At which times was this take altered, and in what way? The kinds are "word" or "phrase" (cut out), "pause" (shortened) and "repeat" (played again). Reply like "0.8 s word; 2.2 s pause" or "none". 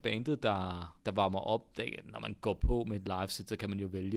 1.0 s pause